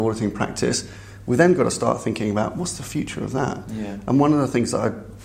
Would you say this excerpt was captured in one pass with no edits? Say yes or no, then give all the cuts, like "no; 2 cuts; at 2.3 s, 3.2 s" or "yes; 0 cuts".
yes; 0 cuts